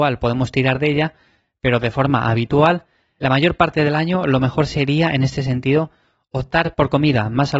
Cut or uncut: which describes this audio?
uncut